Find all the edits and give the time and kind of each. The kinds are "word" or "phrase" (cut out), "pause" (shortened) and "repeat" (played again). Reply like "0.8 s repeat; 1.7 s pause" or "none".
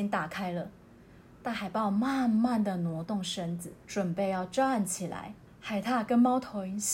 3.8 s pause; 5.5 s pause